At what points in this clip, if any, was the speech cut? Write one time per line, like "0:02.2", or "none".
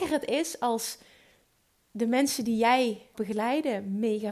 0:03.1

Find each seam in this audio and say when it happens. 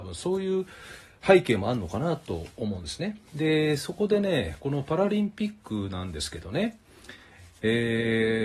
0:03.3

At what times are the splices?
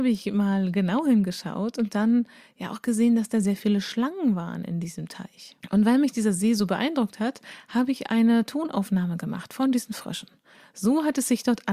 0:05.6

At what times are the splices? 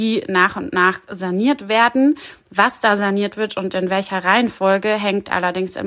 none

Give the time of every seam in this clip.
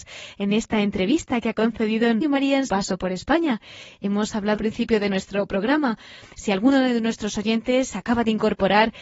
0:02.2
0:02.7
0:04.6

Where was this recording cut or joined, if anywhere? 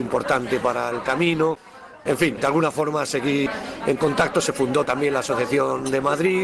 none

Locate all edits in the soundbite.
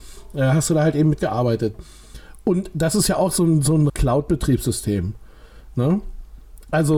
0:03.9

